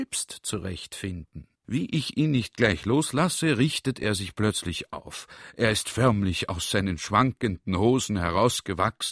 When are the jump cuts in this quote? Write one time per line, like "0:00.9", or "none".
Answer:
0:01.5